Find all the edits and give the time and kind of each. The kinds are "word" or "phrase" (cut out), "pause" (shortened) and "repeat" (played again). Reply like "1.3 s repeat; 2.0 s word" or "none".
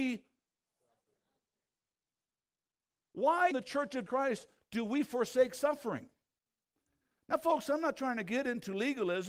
3.5 s word; 4.1 s word